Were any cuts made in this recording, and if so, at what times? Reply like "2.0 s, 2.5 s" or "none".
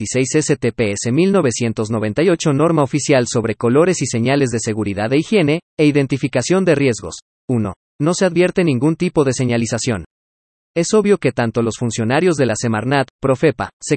none